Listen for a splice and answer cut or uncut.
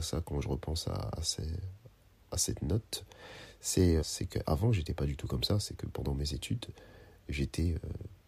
cut